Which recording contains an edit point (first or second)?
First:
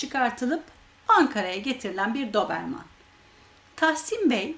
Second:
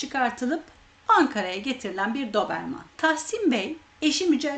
second